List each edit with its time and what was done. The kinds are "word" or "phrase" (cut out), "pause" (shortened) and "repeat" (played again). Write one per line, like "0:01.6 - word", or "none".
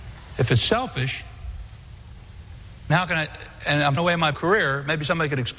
0:02.9 - word
0:04.0 - word
0:04.3 - word

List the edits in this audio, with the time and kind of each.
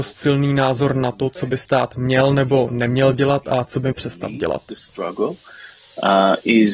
0:03.9 - word

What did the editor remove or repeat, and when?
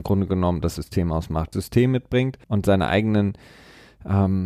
0:01.5 - phrase
0:02.4 - pause

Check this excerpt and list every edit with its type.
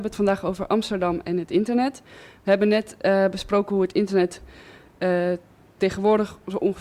none

